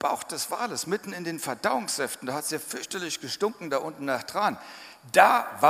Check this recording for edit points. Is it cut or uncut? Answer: uncut